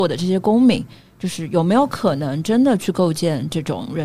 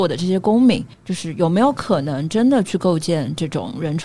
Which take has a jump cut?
second; 1 cut; at 0.9 s

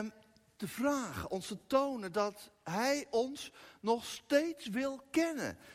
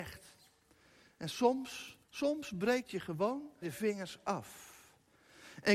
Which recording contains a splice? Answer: second; 3 cuts; at 2.0 s, 2.8 s, 3.6 s

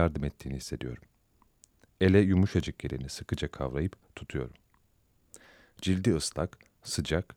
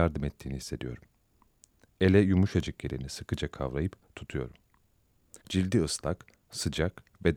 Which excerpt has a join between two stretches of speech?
second; 1 cut; at 5.4 s

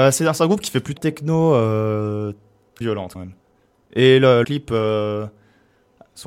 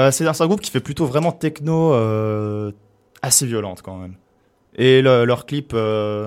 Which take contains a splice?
first; 4 cuts; at 1.0 s, 2.8 s, 3.1 s, 4.4 s

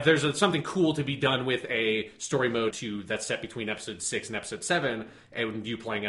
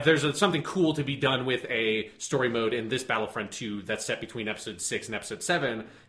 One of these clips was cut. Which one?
first; 1 cut; at 2.7 s

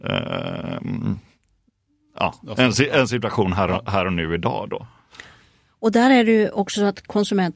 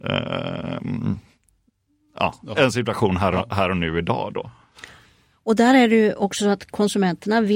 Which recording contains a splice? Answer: second; 1 cut; at 2.5 s

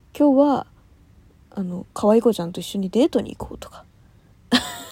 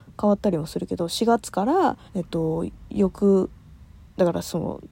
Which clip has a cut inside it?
second; 1 cut; at 2.1 s

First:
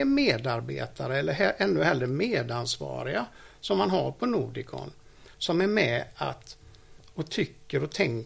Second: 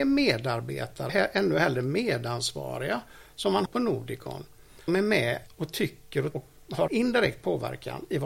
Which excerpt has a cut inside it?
second; 6 cuts; at 1.1 s, 3.7 s, 4.9 s, 5.5 s, 6.3 s, 6.9 s

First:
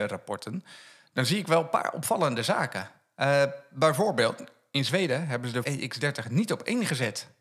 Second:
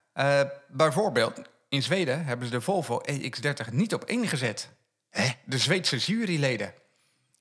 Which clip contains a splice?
first; 1 cut; at 5.6 s

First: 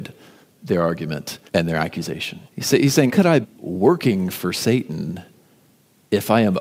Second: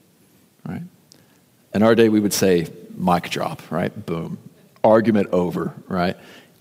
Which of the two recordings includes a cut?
first; 4 cuts; at 1.5 s, 2.5 s, 3.1 s, 3.4 s

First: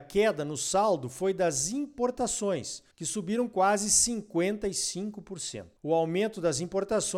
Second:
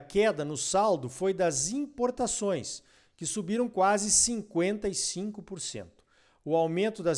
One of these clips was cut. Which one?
first; 2 cuts; at 2.9 s, 5.8 s

